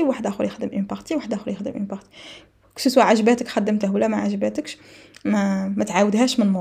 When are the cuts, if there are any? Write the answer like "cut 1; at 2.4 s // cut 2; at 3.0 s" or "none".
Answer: none